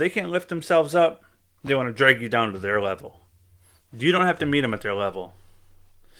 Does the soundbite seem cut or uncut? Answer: uncut